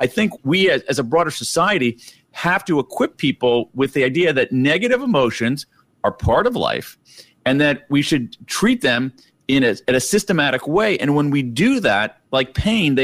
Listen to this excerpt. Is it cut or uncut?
uncut